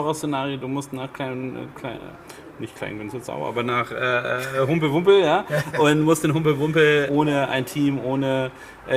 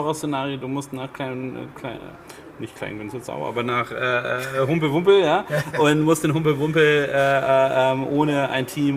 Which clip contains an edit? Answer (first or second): first